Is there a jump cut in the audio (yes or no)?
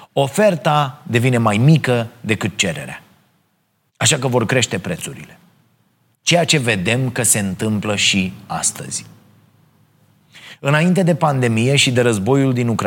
no